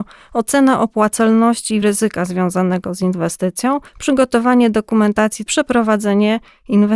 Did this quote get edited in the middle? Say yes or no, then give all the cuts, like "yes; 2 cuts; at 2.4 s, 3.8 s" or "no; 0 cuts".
yes; 3 cuts; at 1.8 s, 3.9 s, 5.5 s